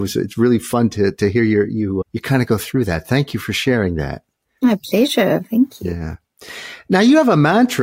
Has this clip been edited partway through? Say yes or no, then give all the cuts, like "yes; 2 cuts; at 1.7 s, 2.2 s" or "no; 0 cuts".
no; 0 cuts